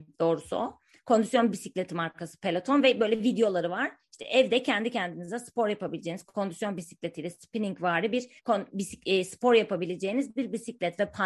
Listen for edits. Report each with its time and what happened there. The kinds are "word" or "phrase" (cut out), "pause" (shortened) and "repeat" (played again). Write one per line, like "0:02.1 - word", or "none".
0:08.4 - pause